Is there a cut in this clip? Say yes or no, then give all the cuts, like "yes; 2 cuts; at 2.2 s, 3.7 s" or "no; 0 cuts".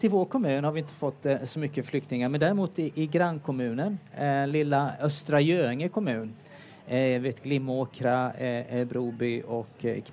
no; 0 cuts